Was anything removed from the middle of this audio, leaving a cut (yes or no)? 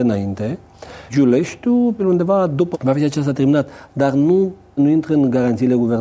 yes